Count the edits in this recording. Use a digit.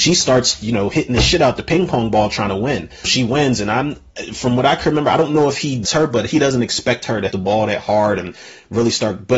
3